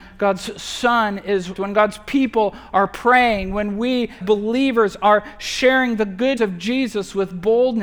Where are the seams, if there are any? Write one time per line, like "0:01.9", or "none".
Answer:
0:01.5
0:04.2
0:06.4